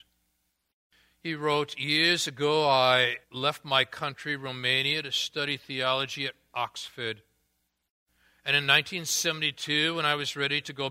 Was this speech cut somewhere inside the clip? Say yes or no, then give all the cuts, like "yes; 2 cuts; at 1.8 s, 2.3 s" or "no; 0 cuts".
yes; 1 cut; at 3.2 s